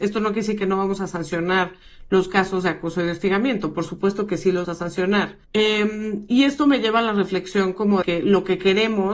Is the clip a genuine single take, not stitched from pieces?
no; 3 cuts; at 4.6 s, 5.4 s, 8.0 s

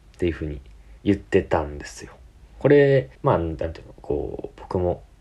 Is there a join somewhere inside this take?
yes; 3 cuts; at 1.0 s, 2.4 s, 3.1 s

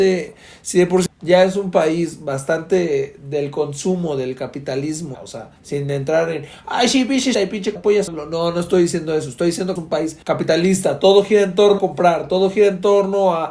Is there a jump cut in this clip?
yes; 9 cuts; at 1.1 s, 5.1 s, 5.6 s, 7.3 s, 7.8 s, 8.1 s, 9.8 s, 10.2 s, 11.8 s

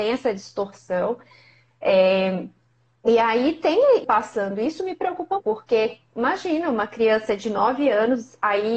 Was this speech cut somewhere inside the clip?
yes; 2 cuts; at 4.0 s, 5.4 s

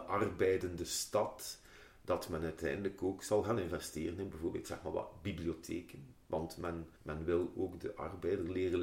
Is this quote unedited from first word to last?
no; 1 cut; at 7.0 s

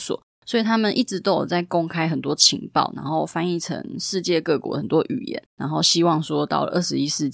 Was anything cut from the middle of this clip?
yes; 1 cut; at 5.5 s

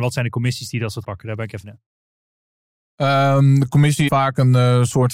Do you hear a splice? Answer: yes; 3 cuts; at 1.0 s, 1.6 s, 4.1 s

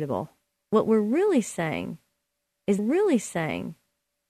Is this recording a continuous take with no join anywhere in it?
no; 1 cut; at 2.8 s

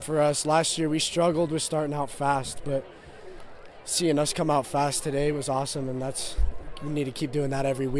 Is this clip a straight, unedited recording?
yes; 0 cuts

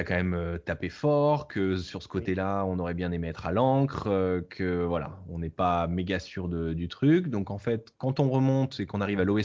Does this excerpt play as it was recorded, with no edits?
yes; 0 cuts

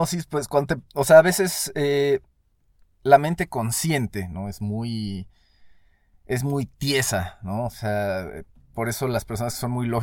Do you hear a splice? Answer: no; 0 cuts

